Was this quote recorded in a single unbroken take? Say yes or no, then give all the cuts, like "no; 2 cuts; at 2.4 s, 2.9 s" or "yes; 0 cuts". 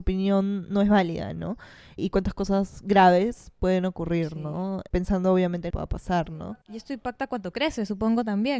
no; 1 cut; at 5.7 s